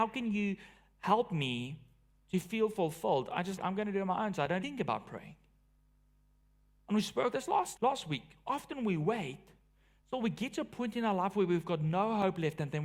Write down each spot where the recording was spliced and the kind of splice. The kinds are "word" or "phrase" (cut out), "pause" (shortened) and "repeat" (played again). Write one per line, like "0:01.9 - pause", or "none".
0:03.6 - word
0:04.6 - word
0:07.3 - word
0:07.8 - word